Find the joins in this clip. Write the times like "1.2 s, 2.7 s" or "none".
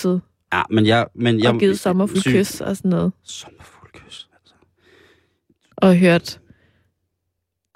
2.1 s